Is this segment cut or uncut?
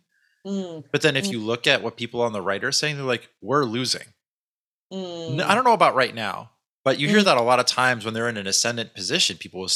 uncut